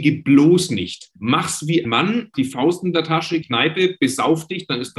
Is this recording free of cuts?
no; 4 cuts; at 1.2 s, 1.8 s, 2.3 s, 3.4 s

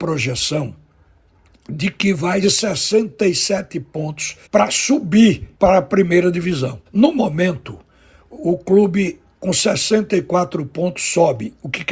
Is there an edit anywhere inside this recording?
yes; 4 cuts; at 2.4 s, 4.5 s, 5.5 s, 6.9 s

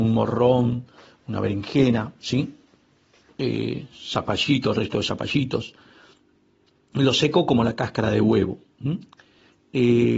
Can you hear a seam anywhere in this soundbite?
no; 0 cuts

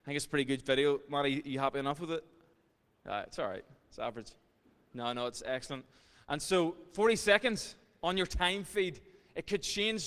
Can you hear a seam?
no; 0 cuts

